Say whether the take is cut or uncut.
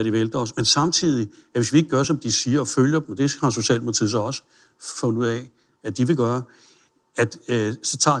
uncut